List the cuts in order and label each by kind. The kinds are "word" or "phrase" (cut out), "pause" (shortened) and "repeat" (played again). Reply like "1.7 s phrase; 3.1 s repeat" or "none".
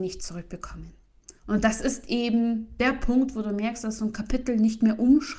1.4 s pause